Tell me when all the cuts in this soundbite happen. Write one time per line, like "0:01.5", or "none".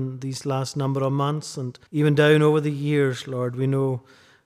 0:01.9